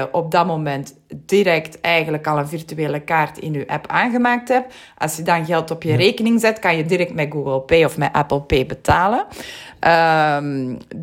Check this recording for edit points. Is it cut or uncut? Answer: uncut